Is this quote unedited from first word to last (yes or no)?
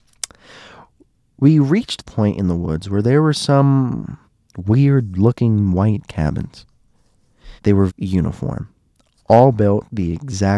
no